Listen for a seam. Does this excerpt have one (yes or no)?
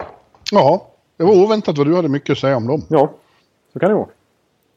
no